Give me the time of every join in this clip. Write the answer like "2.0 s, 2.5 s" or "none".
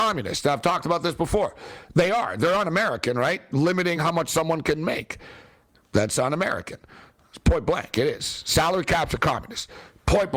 none